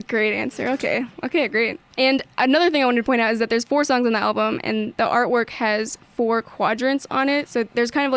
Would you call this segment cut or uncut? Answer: cut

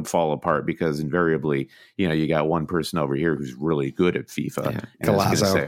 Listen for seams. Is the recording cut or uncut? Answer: uncut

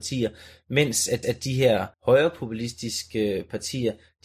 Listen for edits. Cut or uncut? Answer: cut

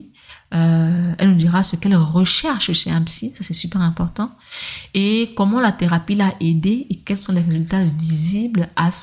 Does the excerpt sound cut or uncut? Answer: uncut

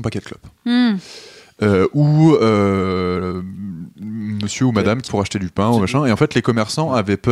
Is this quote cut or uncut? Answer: cut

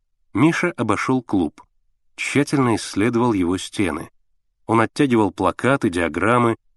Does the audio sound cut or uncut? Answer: uncut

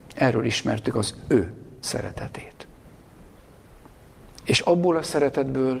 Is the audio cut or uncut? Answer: cut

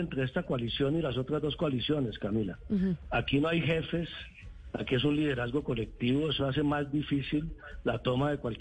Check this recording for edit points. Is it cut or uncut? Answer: uncut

